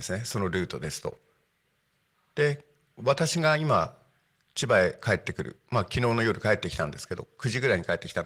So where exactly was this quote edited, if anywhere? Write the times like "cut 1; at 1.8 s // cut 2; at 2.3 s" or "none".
none